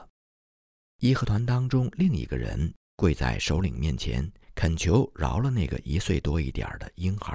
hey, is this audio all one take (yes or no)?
no